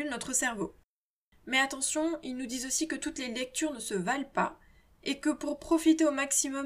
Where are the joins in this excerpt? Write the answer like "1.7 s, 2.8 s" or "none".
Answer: none